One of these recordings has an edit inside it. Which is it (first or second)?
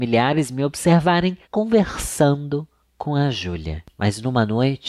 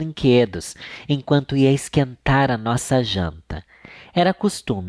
first